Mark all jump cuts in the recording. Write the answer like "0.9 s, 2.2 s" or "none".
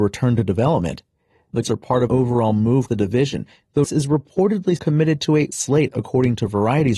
1.6 s, 2.1 s, 2.9 s, 3.8 s, 4.8 s, 5.5 s